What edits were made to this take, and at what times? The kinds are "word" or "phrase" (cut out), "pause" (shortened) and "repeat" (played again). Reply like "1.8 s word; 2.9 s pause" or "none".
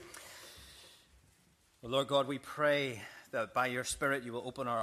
none